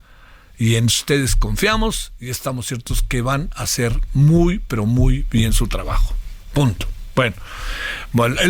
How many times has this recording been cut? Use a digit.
0